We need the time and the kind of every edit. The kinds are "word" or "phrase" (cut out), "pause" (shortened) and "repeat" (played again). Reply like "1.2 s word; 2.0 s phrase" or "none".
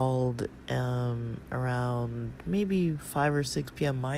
none